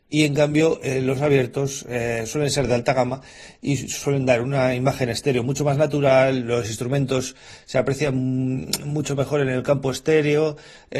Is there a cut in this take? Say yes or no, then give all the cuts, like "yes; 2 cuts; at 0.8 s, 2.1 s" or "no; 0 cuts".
no; 0 cuts